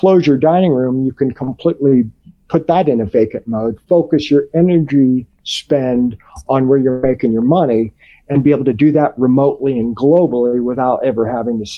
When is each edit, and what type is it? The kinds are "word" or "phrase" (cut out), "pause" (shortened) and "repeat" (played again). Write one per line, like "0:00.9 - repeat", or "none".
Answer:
none